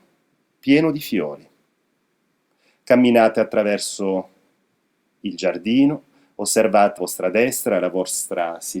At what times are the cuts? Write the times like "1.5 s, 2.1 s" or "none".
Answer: 7.0 s